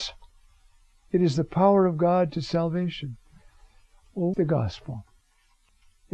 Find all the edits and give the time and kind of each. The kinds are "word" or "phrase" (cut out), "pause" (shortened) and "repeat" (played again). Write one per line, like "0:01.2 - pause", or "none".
0:04.3 - word